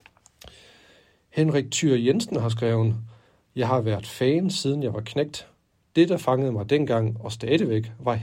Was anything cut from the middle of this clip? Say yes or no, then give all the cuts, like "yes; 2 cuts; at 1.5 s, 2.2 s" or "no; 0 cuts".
no; 0 cuts